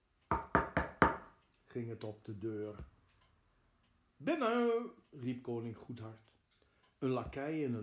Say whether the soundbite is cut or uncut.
uncut